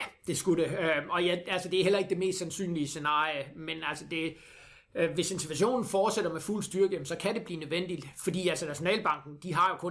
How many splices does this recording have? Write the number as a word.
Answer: zero